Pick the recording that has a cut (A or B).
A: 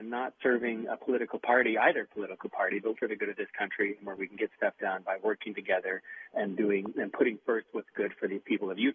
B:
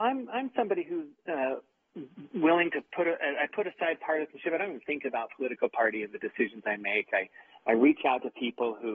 A